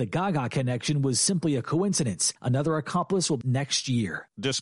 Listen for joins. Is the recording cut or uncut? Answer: cut